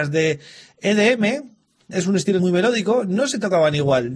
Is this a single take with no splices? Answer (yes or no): no